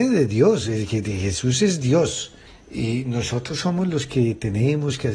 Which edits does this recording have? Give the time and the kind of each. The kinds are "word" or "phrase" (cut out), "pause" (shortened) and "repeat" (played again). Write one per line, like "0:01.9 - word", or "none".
0:02.5 - pause